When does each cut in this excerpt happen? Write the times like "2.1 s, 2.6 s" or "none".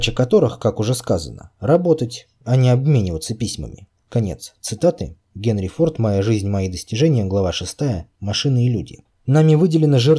4.0 s, 9.1 s